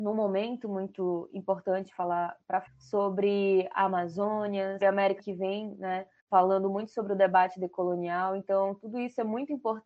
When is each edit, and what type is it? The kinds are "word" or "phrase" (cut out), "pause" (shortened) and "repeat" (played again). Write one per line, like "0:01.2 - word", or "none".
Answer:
0:02.7 - phrase
0:04.8 - word
0:05.2 - word
0:06.2 - pause